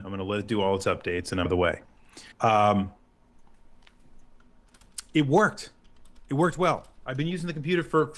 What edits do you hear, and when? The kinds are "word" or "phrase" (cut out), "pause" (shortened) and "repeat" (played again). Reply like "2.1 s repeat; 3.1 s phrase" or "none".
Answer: 1.4 s phrase; 2.3 s pause